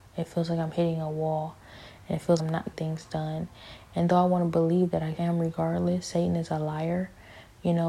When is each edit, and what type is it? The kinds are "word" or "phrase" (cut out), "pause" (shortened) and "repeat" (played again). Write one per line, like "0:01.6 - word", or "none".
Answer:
0:02.4 - word
0:02.7 - word
0:05.2 - word